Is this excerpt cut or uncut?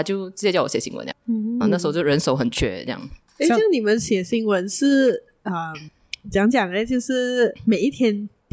cut